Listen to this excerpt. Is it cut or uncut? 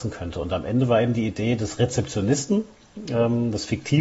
uncut